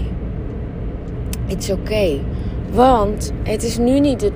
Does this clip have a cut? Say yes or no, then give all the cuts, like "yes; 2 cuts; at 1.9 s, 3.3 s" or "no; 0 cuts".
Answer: no; 0 cuts